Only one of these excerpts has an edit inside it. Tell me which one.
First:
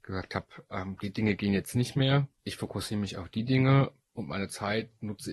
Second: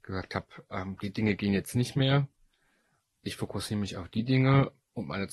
first; 1 cut; at 2.4 s

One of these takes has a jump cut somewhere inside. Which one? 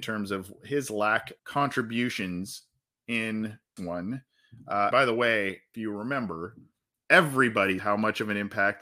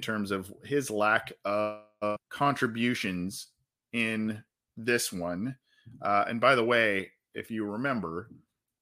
first; 5 cuts; at 1.4 s, 3.8 s, 4.9 s, 5.7 s, 7.8 s

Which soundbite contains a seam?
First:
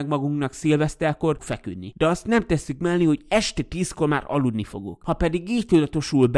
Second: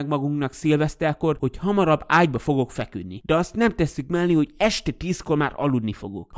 first; 1 cut; at 1.4 s

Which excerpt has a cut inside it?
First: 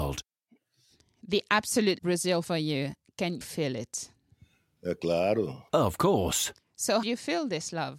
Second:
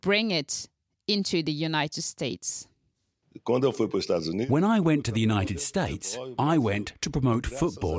first; 4 cuts; at 2.0 s, 2.4 s, 3.4 s, 7.0 s

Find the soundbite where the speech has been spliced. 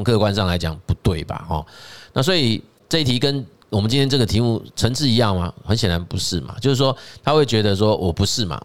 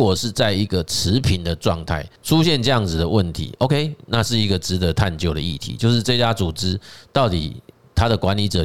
second; 1 cut; at 2.2 s

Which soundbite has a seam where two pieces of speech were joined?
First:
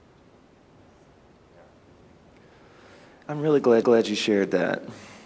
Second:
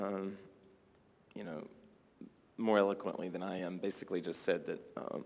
first; 1 cut; at 3.8 s

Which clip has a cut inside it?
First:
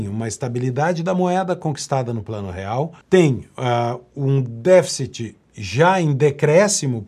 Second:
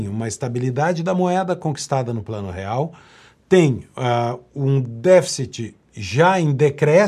first; 1 cut; at 3.0 s

